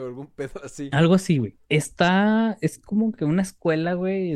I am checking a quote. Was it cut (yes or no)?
yes